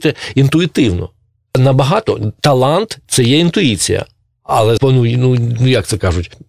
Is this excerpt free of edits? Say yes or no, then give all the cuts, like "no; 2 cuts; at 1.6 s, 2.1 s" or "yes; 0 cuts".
no; 1 cut; at 4.8 s